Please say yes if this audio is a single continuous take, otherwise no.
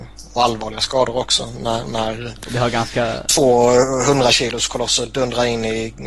yes